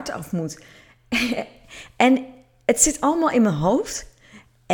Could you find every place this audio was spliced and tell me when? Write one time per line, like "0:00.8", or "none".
none